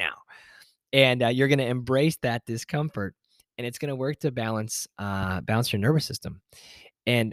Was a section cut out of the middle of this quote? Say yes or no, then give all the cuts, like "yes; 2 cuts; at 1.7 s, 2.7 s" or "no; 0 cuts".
no; 0 cuts